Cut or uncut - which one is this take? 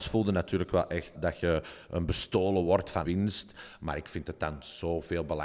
cut